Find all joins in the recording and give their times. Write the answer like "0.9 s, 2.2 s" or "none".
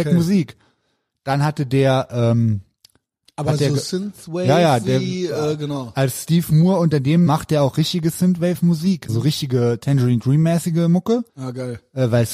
7.3 s, 9.1 s, 11.3 s